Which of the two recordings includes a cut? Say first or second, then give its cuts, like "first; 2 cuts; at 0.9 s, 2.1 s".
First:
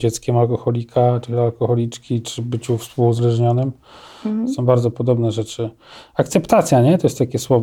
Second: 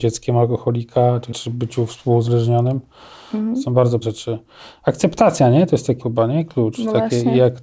second; 3 cuts; at 1.3 s, 4.0 s, 6.0 s